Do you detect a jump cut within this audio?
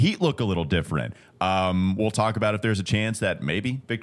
no; 0 cuts

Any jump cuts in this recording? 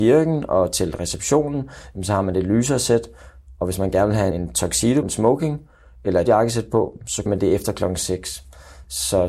yes; 4 cuts; at 4.3 s, 5.0 s, 6.3 s, 7.3 s

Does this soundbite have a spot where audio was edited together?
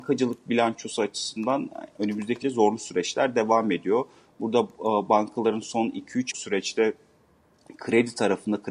yes; 2 cuts; at 2.4 s, 6.3 s

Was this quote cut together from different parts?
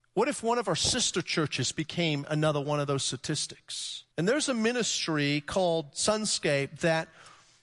yes; 1 cut; at 4.1 s

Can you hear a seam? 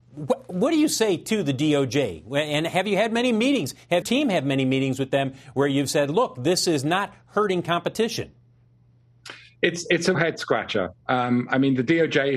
yes; 3 cuts; at 4.0 s, 10.1 s, 11.0 s

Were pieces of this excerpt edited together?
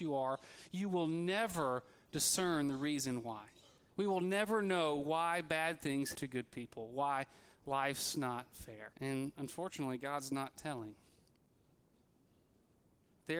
yes; 2 cuts; at 6.1 s, 8.9 s

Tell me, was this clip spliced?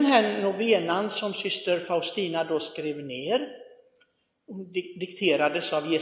no; 0 cuts

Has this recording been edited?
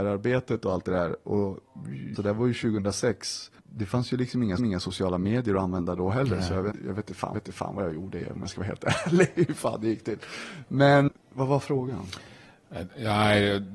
yes; 6 cuts; at 2.2 s, 3.6 s, 4.6 s, 6.7 s, 7.3 s, 11.1 s

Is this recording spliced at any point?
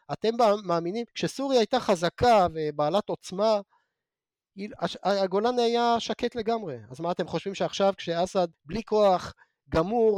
yes; 2 cuts; at 1.1 s, 8.5 s

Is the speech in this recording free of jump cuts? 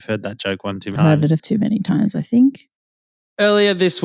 no; 2 cuts; at 1.0 s, 1.4 s

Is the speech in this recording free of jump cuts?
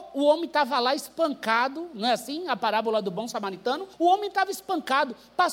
no; 1 cut; at 3.9 s

